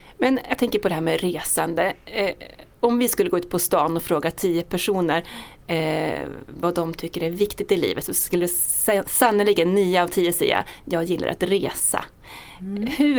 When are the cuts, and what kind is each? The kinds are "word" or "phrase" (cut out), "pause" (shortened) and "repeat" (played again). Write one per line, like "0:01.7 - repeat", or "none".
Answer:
0:02.7 - pause